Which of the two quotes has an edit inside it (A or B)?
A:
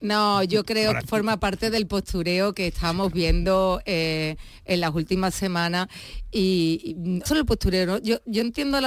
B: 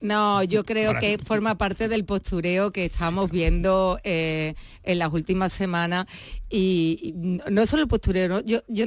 A